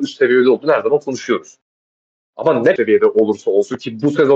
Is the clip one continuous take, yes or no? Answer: no